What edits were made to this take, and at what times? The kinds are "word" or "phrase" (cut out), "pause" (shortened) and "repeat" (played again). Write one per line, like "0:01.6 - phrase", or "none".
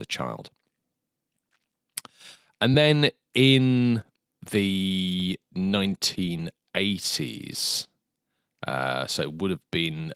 none